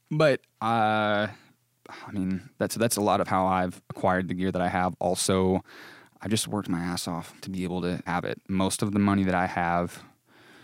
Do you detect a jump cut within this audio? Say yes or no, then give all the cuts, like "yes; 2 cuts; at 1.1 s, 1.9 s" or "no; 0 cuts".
yes; 4 cuts; at 1.7 s, 2.5 s, 7.4 s, 8.1 s